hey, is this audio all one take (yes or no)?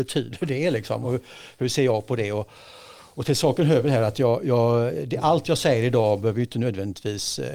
yes